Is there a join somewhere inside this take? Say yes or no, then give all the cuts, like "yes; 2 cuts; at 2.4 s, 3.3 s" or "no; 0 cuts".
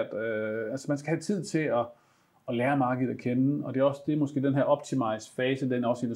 no; 0 cuts